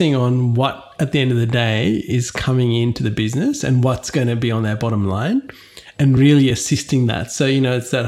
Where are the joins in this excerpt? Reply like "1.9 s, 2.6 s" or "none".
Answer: none

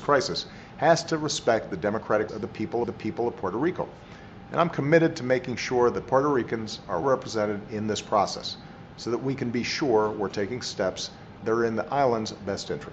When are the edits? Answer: 2.3 s, 2.8 s, 7.0 s

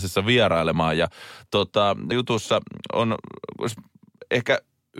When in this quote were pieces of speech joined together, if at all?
2.1 s

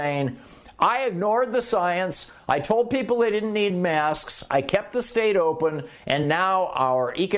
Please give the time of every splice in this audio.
none

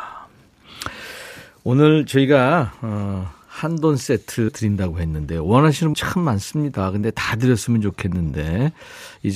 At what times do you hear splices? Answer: 4.5 s, 5.9 s

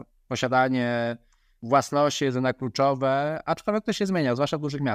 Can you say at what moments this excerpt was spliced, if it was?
none

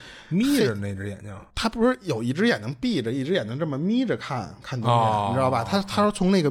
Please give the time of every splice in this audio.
1.5 s

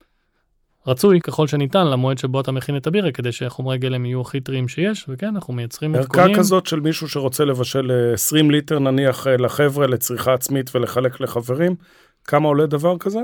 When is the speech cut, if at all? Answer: 1.2 s

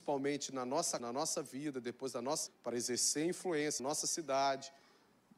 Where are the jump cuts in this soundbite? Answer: 1.0 s, 2.5 s, 3.8 s

